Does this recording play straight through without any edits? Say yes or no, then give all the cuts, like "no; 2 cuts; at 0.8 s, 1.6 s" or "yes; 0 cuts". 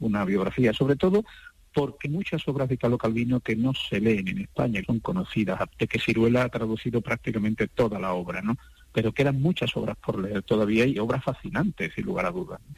no; 4 cuts; at 2.1 s, 4.8 s, 5.7 s, 11.0 s